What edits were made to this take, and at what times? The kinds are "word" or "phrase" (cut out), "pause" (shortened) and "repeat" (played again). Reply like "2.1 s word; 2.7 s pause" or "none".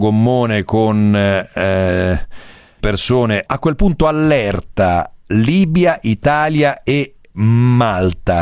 2.8 s phrase; 3.5 s phrase